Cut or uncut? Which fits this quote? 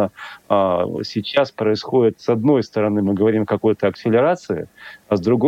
uncut